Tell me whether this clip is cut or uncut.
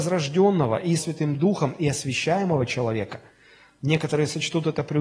cut